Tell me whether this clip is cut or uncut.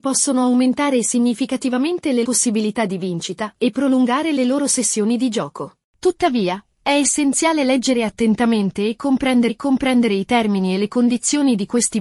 cut